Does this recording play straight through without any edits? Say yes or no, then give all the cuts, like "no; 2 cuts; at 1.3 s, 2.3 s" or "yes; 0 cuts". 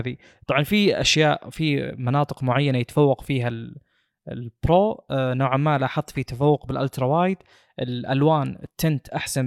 yes; 0 cuts